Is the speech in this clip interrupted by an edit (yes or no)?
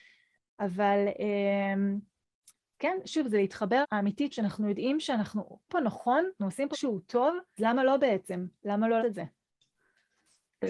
yes